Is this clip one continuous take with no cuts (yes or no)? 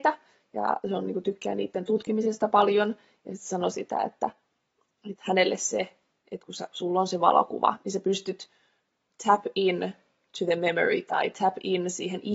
yes